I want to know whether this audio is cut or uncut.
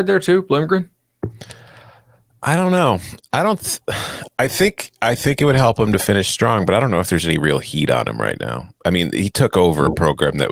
uncut